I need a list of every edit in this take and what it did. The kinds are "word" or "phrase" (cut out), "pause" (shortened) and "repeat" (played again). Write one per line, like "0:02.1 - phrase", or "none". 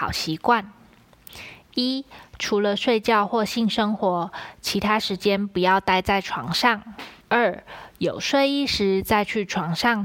0:07.2 - pause